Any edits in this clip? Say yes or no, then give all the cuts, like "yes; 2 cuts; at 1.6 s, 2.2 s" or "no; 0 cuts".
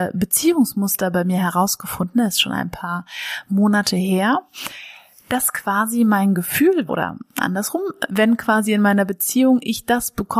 yes; 2 cuts; at 6.9 s, 8.1 s